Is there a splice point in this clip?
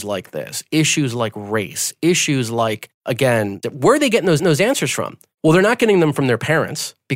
yes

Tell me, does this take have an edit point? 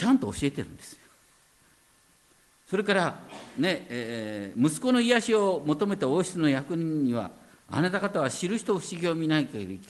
no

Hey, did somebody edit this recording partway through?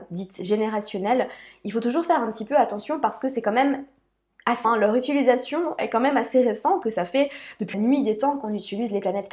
yes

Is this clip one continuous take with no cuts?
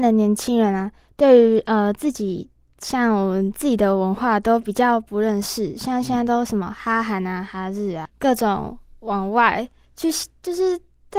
no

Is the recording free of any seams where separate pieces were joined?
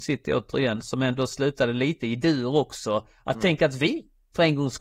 yes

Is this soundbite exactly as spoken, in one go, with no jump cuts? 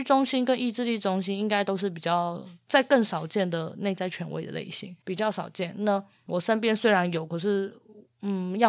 no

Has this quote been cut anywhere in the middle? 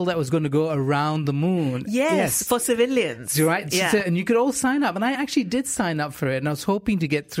no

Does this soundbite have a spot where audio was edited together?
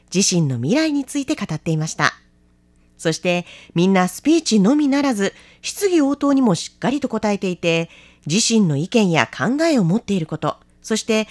no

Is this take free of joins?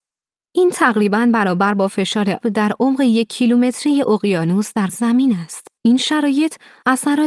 no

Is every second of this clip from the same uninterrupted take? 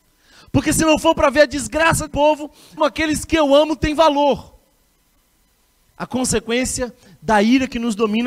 no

